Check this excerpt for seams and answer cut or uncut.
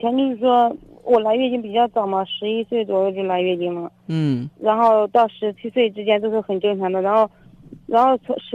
cut